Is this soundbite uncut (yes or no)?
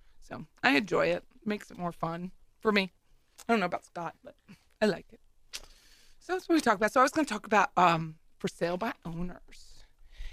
yes